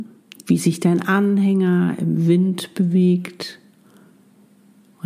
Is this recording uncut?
yes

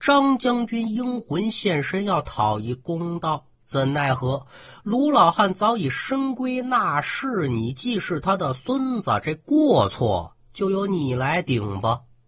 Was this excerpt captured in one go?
no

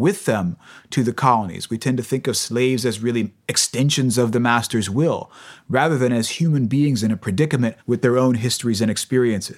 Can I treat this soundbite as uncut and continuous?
no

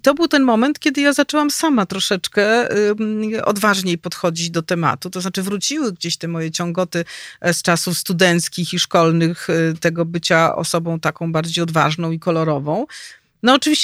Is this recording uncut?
yes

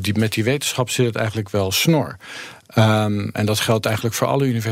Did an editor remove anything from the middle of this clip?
yes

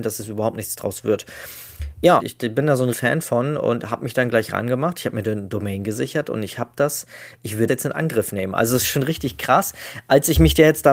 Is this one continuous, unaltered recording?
no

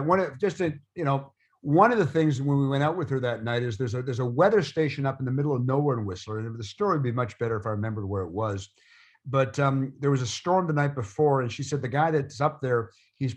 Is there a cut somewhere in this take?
no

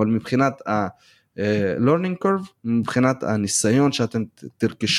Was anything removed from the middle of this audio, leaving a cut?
yes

